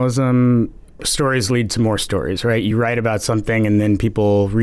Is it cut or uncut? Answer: uncut